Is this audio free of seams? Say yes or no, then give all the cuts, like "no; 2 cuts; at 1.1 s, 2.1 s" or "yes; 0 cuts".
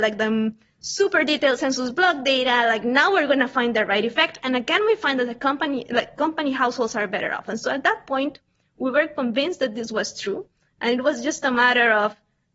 yes; 0 cuts